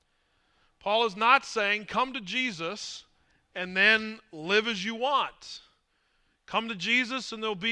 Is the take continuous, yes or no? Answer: yes